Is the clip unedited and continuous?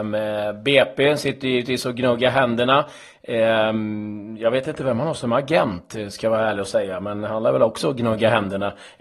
yes; 0 cuts

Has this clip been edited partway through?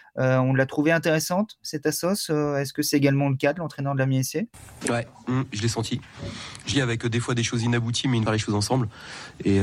yes; 2 cuts; at 6.7 s, 8.3 s

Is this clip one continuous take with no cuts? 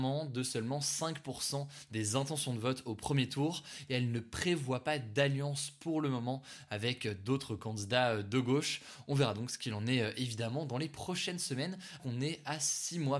no; 1 cut; at 12.0 s

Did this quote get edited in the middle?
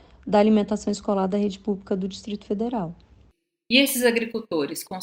no; 0 cuts

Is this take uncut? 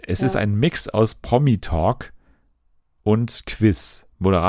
yes; 0 cuts

